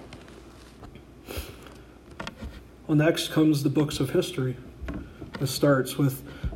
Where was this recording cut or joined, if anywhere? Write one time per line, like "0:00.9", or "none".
none